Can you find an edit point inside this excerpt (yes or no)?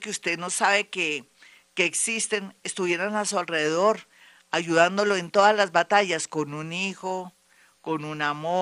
no